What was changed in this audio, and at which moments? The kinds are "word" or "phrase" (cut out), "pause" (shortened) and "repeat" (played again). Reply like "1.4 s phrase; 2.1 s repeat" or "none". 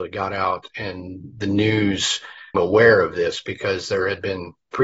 2.5 s word